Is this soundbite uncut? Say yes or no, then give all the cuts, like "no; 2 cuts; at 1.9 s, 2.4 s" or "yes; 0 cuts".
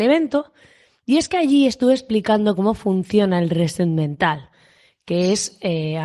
yes; 0 cuts